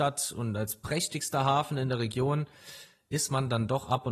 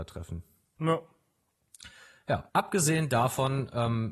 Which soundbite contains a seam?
second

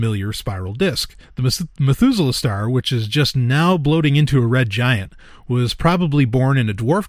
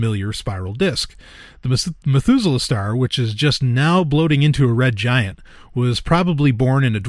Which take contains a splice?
first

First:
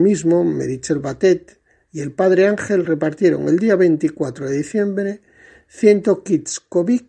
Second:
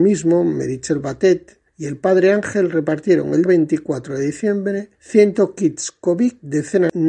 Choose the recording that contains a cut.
second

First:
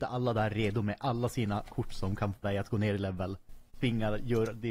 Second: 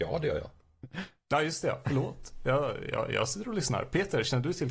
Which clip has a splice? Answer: first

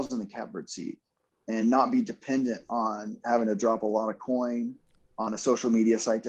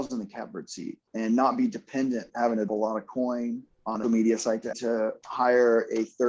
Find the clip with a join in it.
second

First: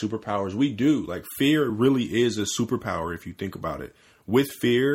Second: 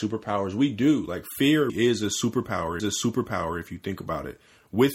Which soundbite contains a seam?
second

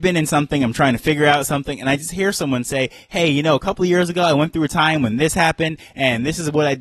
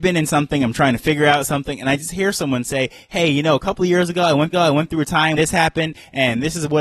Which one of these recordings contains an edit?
second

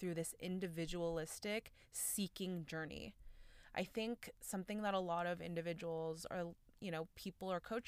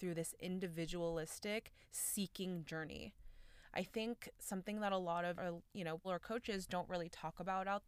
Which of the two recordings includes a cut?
second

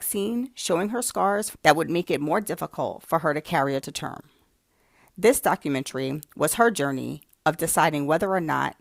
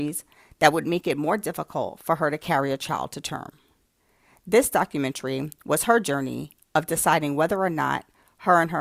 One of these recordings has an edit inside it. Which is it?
first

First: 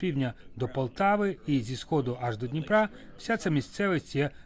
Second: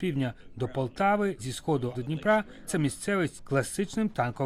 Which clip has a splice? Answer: second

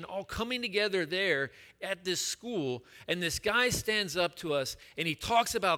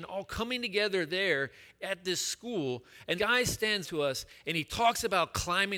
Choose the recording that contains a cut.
second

